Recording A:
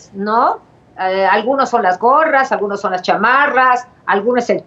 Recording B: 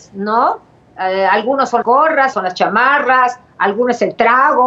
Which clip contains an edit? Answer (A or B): B